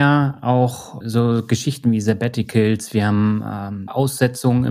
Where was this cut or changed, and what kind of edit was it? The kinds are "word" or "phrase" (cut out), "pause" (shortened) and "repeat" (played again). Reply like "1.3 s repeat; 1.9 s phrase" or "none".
1.0 s word